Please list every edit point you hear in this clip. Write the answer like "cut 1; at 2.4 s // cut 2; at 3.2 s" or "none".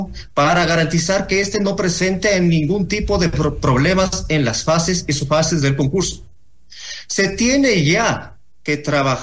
none